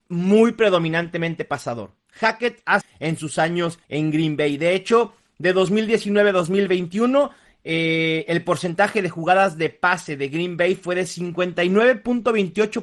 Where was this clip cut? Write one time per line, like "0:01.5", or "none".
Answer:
0:02.8
0:03.8